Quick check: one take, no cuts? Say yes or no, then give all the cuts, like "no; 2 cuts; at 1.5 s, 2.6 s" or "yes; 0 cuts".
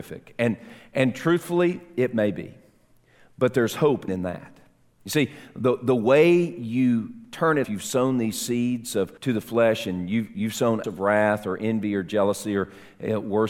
no; 4 cuts; at 4.1 s, 7.6 s, 9.2 s, 10.8 s